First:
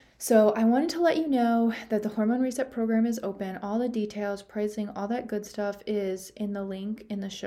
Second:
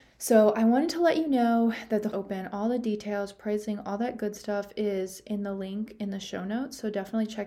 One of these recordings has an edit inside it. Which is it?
second; 1 cut; at 2.1 s

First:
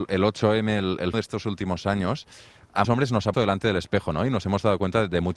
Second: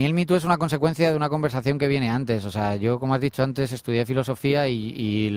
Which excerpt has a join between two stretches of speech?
first; 3 cuts; at 1.1 s, 2.8 s, 3.3 s

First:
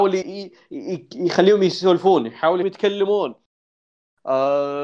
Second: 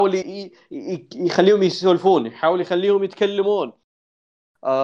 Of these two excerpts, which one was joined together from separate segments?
first; 1 cut; at 2.6 s

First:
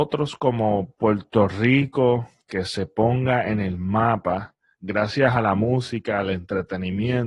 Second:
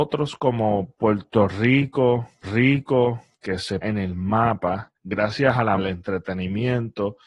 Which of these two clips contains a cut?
second; 4 cuts; at 2.4 s, 3.8 s, 4.9 s, 5.8 s

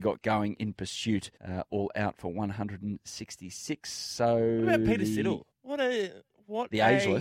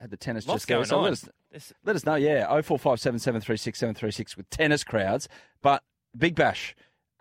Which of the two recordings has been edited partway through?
first; 2 cuts; at 1.4 s, 5.5 s

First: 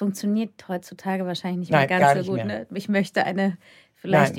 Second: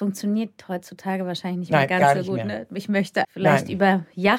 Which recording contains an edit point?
second; 1 cut; at 3.2 s

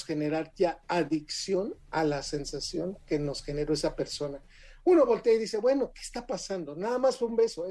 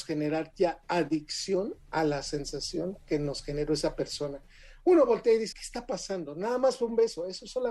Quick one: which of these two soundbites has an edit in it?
second; 1 cut; at 5.5 s

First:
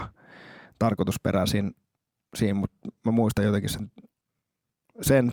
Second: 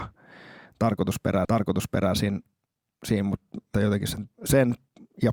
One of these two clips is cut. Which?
second; 3 cuts; at 1.4 s, 3.7 s, 4.3 s

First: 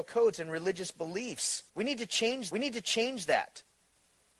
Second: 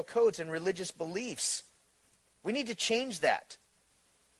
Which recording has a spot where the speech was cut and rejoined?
first; 2 cuts; at 1.7 s, 2.5 s

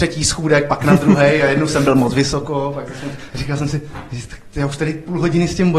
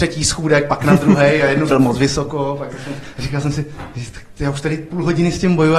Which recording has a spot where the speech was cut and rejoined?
second; 1 cut; at 1.7 s

